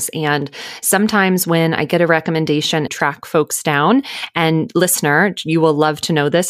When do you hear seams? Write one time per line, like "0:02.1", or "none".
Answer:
0:02.9